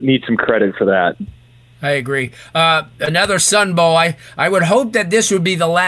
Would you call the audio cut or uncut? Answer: uncut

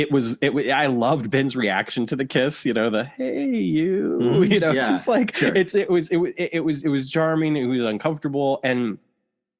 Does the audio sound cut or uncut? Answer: uncut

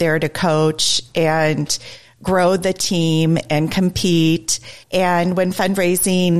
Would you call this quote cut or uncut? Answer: cut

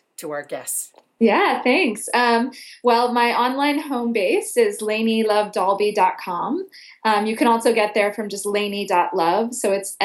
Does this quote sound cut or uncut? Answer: uncut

